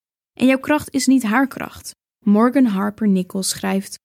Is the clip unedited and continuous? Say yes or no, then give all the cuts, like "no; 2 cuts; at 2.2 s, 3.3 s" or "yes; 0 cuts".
yes; 0 cuts